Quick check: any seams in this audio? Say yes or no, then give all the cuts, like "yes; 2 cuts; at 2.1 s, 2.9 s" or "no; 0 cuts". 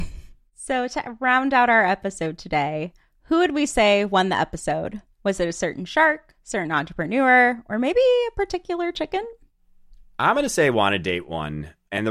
no; 0 cuts